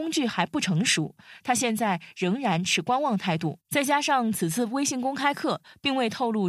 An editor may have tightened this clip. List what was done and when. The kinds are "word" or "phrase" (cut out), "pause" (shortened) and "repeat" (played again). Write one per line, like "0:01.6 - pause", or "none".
0:03.6 - pause